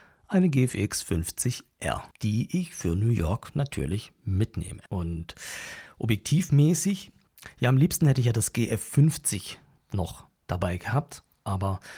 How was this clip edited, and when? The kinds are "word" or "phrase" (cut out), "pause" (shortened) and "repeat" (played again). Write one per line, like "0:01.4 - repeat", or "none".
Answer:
0:02.1 - pause
0:04.9 - pause
0:09.8 - pause